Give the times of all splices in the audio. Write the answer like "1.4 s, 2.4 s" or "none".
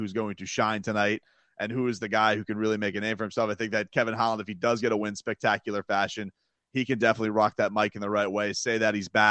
none